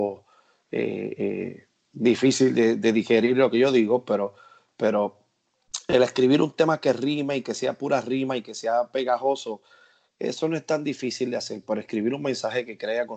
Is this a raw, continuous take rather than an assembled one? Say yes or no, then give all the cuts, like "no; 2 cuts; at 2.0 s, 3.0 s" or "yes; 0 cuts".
yes; 0 cuts